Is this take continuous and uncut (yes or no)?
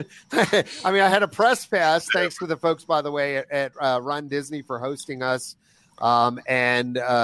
yes